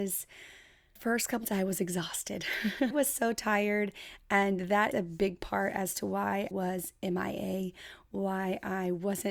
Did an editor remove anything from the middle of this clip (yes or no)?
yes